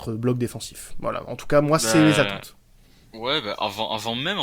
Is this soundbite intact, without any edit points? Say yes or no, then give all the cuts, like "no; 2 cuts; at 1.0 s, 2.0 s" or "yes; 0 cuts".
yes; 0 cuts